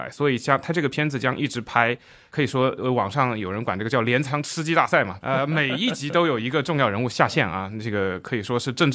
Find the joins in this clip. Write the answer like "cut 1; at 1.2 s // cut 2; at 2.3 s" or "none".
cut 1; at 5.2 s